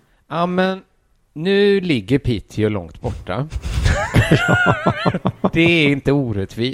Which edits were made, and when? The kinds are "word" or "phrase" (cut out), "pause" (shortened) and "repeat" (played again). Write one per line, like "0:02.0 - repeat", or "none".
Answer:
none